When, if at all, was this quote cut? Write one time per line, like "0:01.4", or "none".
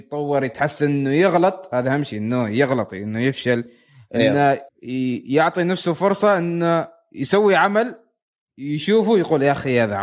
0:04.7